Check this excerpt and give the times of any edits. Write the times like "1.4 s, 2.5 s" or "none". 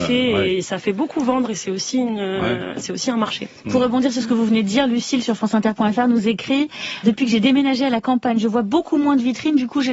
7.0 s